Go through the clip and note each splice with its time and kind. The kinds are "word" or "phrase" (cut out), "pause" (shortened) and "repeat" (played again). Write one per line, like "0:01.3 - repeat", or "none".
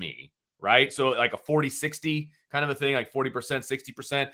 none